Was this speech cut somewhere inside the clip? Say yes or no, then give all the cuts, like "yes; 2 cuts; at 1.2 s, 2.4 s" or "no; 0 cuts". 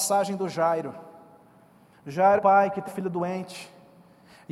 yes; 2 cuts; at 2.4 s, 2.9 s